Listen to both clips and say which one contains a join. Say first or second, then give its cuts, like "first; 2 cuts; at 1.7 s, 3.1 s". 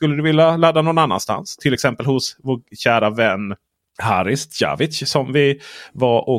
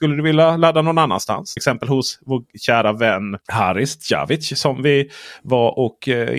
second; 2 cuts; at 1.6 s, 3.4 s